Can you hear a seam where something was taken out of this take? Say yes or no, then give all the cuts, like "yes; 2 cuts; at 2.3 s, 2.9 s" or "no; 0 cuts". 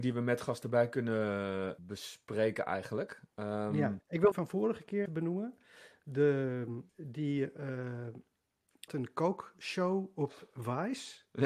yes; 6 cuts; at 1.8 s, 4.0 s, 4.3 s, 5.1 s, 6.9 s, 8.9 s